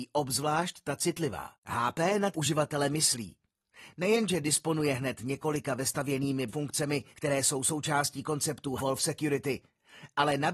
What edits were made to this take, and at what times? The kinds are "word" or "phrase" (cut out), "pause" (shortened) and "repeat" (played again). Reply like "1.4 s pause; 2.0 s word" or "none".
1.6 s pause; 2.3 s word; 6.5 s word; 7.1 s pause; 8.8 s word